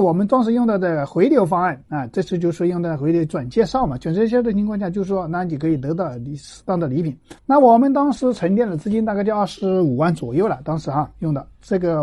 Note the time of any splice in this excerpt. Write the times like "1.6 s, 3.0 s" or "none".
7.4 s